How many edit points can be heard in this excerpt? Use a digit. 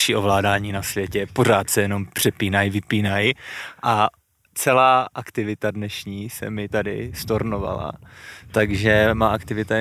0